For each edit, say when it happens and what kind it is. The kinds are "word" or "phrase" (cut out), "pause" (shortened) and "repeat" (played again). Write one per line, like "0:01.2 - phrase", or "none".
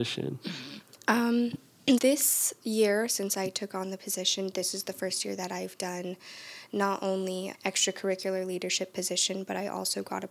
0:02.0 - word
0:07.5 - word

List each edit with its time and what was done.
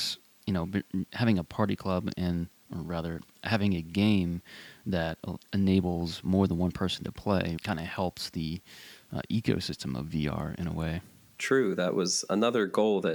0:07.6 - word

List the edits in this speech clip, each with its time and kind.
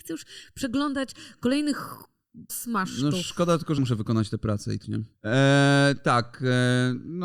0:02.5 - word
0:03.8 - word
0:04.8 - word
0:05.1 - pause

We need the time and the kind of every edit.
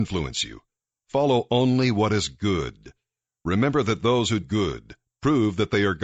0:04.4 - word

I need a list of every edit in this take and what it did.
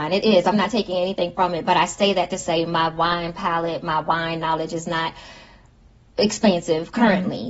none

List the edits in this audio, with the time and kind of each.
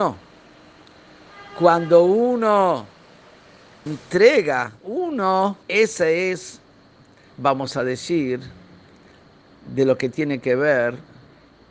0:03.9 - word
0:04.8 - phrase
0:05.6 - pause
0:07.3 - phrase

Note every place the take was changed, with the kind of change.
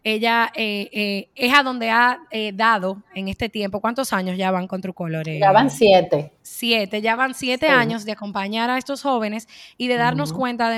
0:06.4 - pause

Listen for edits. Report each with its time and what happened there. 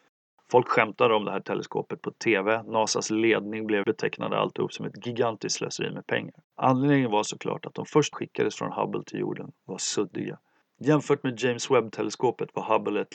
0:03.8 - phrase
0:06.4 - pause
0:08.1 - phrase
0:10.6 - pause

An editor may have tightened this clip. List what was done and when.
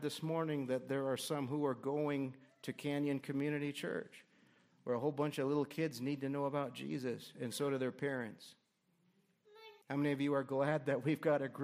0:09.8 - pause

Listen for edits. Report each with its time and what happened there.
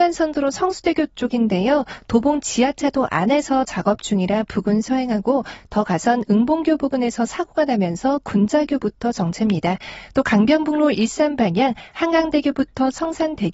none

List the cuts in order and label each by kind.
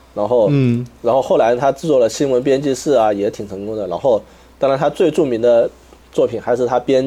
none

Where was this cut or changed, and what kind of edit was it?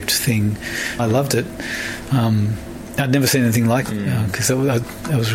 0:01.0 - word
0:03.8 - phrase

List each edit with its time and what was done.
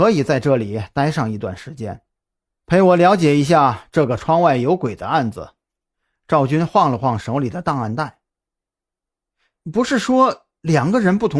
none

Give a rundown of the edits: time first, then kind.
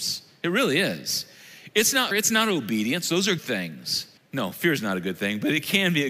0:02.1 - word
0:03.4 - word
0:04.2 - pause

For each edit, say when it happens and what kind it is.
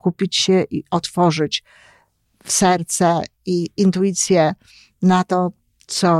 none

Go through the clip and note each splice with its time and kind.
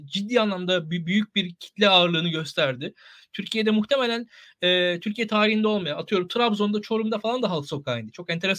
none

